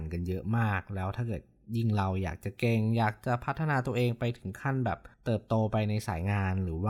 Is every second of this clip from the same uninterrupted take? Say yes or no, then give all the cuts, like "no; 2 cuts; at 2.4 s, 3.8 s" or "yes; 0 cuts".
no; 1 cut; at 5.1 s